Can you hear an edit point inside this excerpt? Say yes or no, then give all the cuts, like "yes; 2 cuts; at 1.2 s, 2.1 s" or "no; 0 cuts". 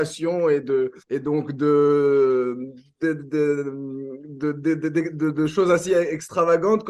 yes; 1 cut; at 1.0 s